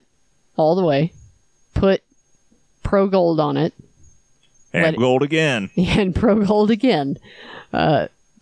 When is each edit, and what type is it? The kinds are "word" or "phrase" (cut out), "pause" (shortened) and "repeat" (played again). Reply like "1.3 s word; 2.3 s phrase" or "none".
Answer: 5.0 s word